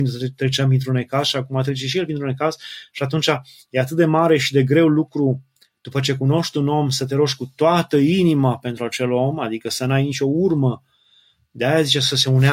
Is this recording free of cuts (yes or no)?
yes